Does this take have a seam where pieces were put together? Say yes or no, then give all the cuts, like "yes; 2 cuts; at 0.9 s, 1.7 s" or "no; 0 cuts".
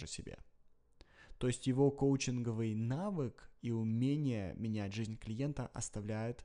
no; 0 cuts